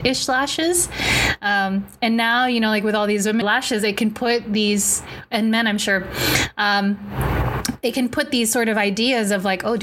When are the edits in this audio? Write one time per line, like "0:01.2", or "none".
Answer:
0:03.4